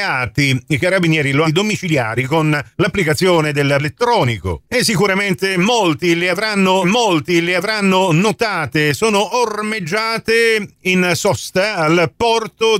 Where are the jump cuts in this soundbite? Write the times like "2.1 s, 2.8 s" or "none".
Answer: 1.4 s, 2.7 s, 3.8 s, 4.7 s, 6.8 s